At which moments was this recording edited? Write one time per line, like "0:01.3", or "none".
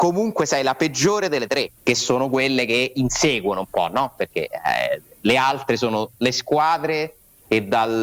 0:01.8